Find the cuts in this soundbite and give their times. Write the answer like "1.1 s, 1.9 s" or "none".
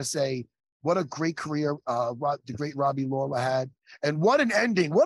none

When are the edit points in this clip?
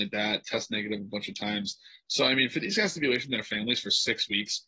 none

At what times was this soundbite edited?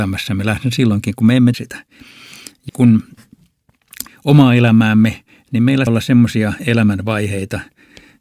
1.5 s, 2.7 s, 4.1 s, 5.9 s, 6.6 s

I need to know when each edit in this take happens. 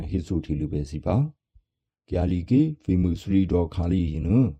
none

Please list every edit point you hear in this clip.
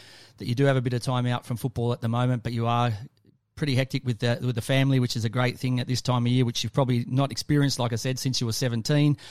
none

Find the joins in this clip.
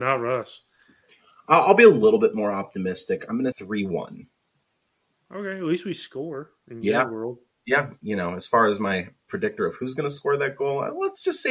3.5 s, 8.0 s

